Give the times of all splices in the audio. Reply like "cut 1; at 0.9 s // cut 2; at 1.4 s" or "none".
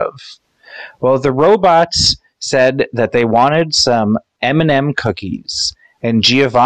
none